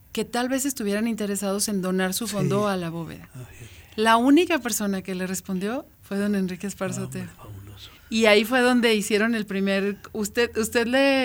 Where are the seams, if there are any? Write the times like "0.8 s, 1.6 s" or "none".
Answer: 5.9 s, 8.0 s